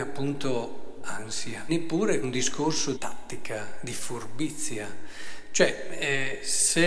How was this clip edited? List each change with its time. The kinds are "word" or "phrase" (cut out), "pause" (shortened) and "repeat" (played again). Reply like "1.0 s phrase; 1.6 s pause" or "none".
1.7 s word; 2.2 s word; 2.9 s word